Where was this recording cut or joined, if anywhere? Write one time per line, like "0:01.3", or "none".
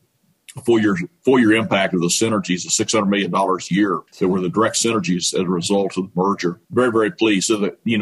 0:04.1
0:06.6